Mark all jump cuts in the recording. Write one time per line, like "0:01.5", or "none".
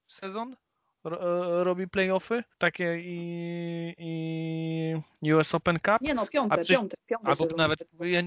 0:02.5